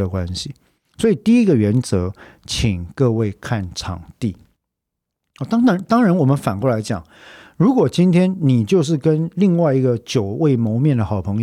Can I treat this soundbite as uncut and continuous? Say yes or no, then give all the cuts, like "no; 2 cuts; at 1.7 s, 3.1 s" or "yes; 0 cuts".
yes; 0 cuts